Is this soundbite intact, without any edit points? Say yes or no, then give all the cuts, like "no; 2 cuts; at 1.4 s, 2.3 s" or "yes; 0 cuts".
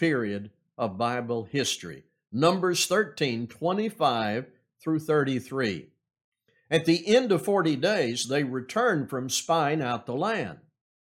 yes; 0 cuts